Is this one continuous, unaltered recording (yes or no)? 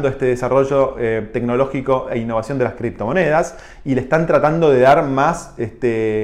yes